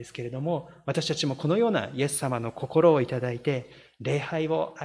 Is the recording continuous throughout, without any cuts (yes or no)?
yes